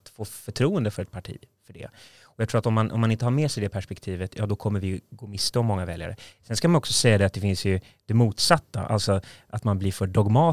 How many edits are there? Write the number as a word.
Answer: zero